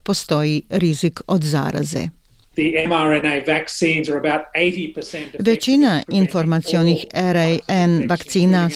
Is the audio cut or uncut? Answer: uncut